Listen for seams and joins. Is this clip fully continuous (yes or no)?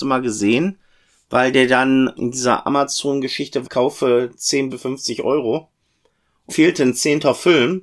no